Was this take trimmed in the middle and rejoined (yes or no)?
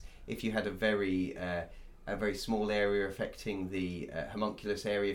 no